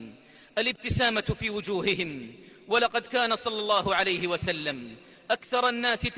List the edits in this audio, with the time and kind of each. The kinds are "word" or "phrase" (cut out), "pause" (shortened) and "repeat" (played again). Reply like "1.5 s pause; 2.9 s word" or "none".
none